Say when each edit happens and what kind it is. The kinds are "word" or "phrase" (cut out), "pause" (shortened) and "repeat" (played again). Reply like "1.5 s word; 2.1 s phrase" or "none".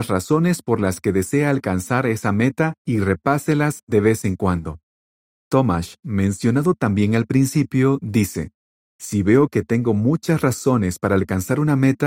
none